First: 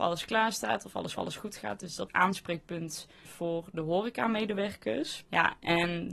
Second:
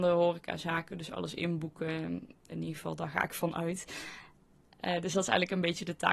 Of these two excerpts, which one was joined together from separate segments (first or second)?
first